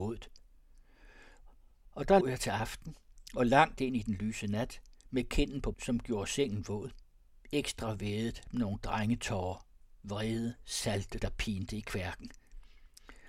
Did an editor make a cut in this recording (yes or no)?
yes